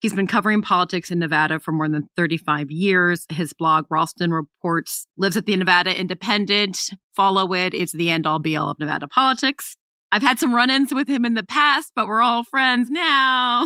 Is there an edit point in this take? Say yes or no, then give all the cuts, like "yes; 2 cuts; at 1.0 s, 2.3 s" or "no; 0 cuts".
no; 0 cuts